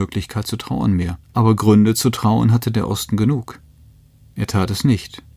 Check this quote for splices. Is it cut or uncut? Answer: cut